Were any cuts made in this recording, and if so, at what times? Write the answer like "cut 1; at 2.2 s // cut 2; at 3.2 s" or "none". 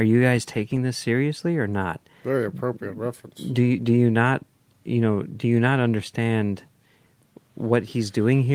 none